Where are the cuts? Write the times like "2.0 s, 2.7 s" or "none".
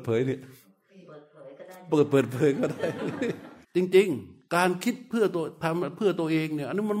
3.6 s, 4.5 s